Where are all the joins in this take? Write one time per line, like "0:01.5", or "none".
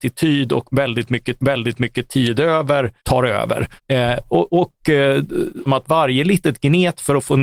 0:01.4
0:03.0
0:03.8
0:05.7